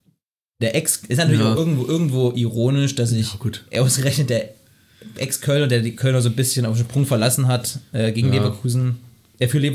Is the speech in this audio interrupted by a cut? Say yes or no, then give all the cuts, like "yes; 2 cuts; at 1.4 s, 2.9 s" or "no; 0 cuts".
no; 0 cuts